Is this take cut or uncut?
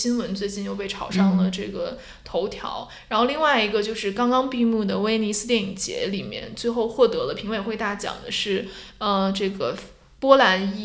uncut